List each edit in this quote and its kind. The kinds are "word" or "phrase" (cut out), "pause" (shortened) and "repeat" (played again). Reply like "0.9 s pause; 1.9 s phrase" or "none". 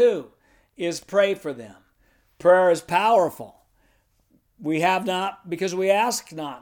none